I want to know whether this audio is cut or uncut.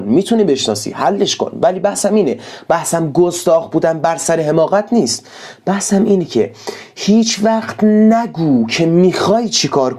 uncut